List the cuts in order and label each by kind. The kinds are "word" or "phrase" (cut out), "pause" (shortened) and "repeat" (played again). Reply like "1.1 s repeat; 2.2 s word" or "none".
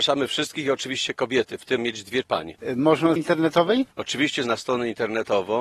1.8 s phrase; 2.2 s word; 3.2 s phrase; 4.4 s word